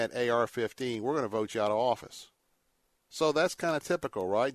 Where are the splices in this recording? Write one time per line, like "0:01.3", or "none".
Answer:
none